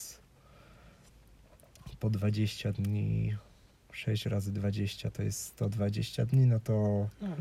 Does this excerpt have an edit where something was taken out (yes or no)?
no